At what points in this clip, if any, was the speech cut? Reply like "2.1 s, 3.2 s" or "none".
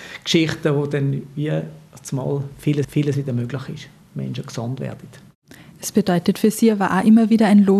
2.8 s